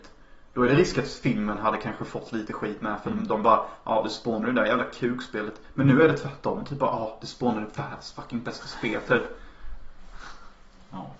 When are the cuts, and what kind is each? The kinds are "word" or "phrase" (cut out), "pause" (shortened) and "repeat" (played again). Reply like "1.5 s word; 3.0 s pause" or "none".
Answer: none